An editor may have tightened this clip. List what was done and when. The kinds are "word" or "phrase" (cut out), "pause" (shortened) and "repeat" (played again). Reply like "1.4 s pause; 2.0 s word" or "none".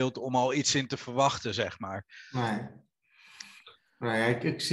none